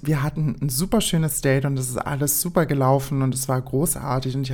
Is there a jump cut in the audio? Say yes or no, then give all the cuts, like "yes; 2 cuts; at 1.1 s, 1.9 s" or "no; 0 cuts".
no; 0 cuts